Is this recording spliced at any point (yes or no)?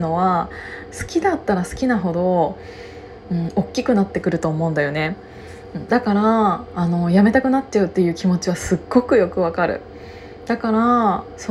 no